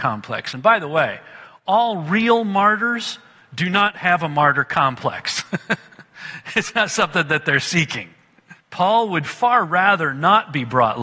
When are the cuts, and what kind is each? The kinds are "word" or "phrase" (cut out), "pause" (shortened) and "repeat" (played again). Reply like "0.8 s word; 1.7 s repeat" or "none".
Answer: 8.6 s pause